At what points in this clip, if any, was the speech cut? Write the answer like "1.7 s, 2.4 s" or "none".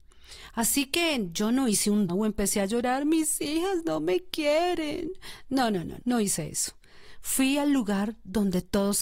2.1 s, 6.0 s